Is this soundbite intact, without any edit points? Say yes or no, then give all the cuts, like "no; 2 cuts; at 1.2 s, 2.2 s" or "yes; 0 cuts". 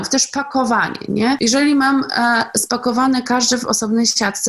yes; 0 cuts